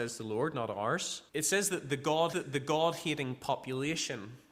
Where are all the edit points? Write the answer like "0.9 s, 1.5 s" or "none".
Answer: 1.3 s, 2.3 s